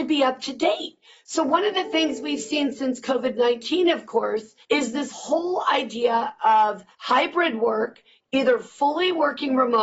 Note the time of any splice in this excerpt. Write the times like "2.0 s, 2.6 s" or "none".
4.6 s, 6.9 s